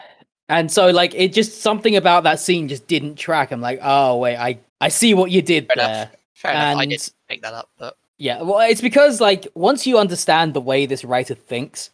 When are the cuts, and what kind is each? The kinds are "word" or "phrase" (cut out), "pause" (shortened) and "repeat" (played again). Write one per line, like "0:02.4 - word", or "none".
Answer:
0:04.7 - pause
0:06.2 - pause
0:08.1 - pause